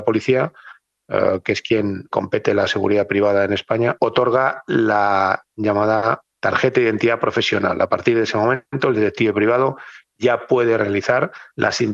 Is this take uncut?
no; 1 cut; at 2.1 s

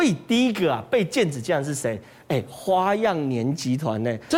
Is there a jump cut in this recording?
no; 0 cuts

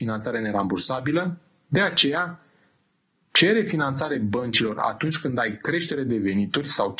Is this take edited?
no; 0 cuts

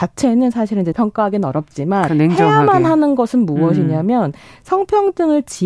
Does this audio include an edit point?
yes; 2 cuts; at 0.9 s, 2.1 s

